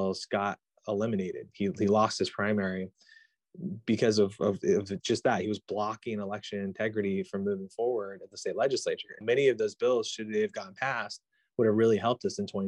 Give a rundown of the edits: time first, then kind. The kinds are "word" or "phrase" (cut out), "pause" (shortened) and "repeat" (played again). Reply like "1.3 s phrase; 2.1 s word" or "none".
9.2 s word